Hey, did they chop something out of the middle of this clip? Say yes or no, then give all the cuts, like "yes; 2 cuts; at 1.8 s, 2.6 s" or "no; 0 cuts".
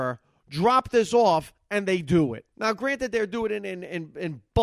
yes; 1 cut; at 2.5 s